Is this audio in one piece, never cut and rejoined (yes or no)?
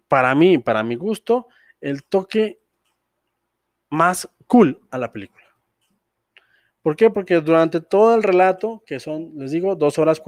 yes